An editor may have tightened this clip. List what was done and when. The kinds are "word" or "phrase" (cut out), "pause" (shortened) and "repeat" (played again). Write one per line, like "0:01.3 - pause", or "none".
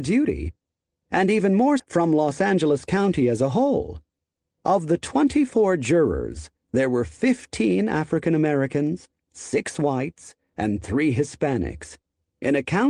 0:01.8 - word

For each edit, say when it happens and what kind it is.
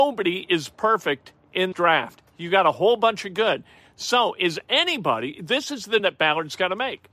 0:01.7 - word
0:06.0 - word

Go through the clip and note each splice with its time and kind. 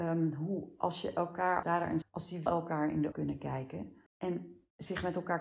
0:01.6 - word
0:02.0 - word
0:02.5 - word
0:03.1 - word

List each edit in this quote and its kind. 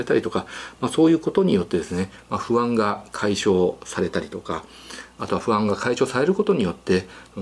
none

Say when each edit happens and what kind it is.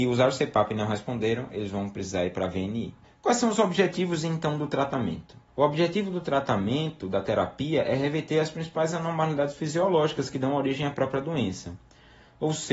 0:03.0 - pause
0:05.5 - pause

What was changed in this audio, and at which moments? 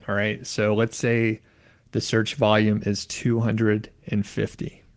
none

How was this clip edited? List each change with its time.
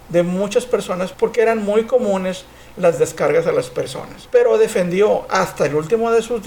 none

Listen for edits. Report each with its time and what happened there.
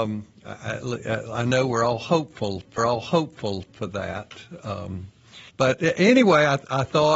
0:02.8 - repeat
0:05.5 - pause

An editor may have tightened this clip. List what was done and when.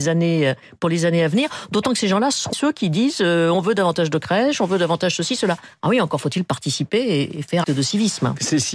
0:02.5 - word
0:07.6 - word

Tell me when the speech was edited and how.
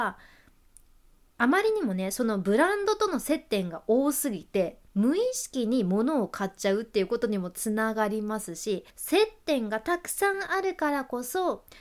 0:04.9 - pause
0:08.9 - pause

